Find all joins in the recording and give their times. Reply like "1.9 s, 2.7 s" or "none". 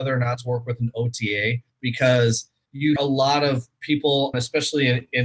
1.7 s, 3.0 s, 4.3 s